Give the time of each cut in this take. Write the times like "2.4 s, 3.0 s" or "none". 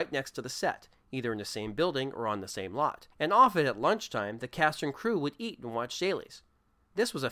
3.1 s